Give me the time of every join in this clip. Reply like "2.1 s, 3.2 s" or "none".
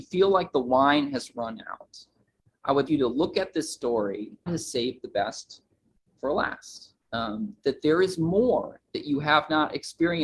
2.9 s, 4.5 s, 7.0 s